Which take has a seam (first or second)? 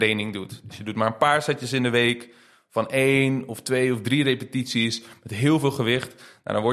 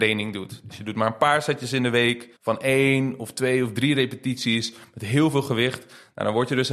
second